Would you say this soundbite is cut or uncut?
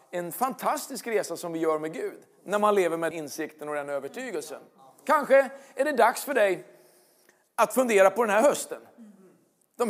cut